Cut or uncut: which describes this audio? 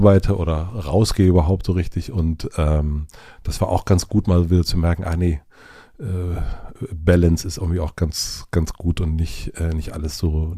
uncut